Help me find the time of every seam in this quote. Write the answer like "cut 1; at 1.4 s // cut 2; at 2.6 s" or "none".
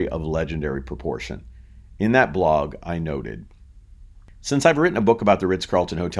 none